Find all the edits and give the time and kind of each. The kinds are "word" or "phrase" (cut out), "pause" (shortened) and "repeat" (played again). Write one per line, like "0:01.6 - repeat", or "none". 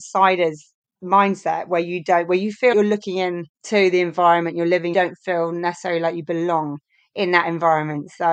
0:02.7 - word
0:03.5 - pause
0:04.9 - phrase